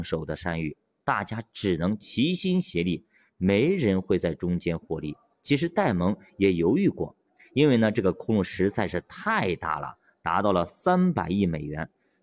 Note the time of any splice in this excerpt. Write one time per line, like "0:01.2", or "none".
none